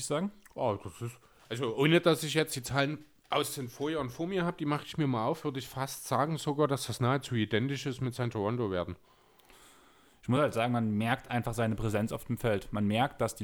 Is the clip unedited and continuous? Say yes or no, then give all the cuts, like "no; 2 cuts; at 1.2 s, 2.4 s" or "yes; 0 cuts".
yes; 0 cuts